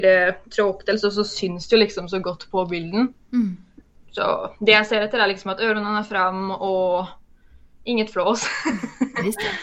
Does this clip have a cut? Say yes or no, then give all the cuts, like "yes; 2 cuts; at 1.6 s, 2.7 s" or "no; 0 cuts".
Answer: no; 0 cuts